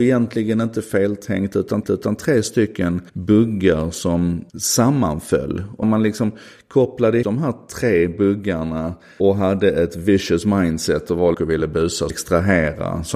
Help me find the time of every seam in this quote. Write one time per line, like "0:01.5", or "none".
0:01.8
0:03.1
0:04.5
0:05.8
0:07.2
0:09.2
0:11.3
0:12.1